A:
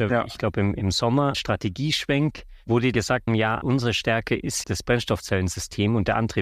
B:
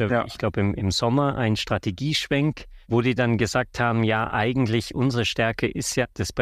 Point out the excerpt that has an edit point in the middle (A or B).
A